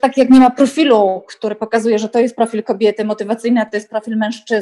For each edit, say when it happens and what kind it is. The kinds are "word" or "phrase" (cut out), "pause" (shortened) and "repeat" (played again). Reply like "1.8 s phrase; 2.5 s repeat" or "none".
none